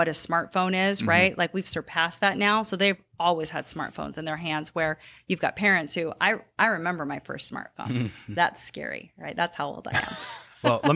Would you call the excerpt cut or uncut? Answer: uncut